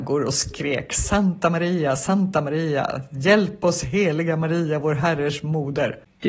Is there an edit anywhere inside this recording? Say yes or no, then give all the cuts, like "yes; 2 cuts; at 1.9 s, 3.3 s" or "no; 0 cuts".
no; 0 cuts